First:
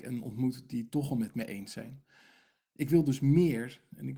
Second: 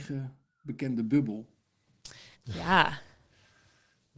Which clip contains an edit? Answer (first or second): second